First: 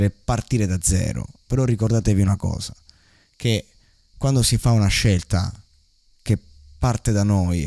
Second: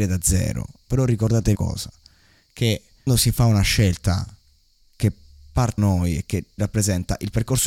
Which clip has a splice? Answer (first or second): second